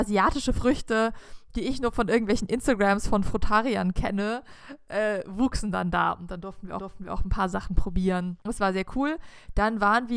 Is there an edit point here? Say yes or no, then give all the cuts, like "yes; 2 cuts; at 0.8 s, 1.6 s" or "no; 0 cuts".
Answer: yes; 1 cut; at 6.8 s